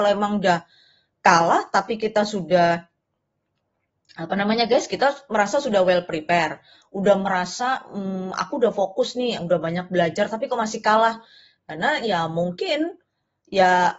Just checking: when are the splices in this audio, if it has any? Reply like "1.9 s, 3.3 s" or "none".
none